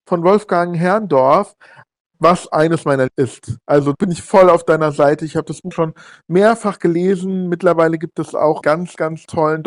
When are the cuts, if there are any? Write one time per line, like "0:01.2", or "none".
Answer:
0:02.5
0:03.1
0:03.9
0:05.7
0:08.6